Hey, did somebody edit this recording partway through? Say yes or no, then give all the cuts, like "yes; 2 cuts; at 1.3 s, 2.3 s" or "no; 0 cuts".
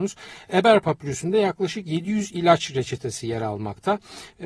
no; 0 cuts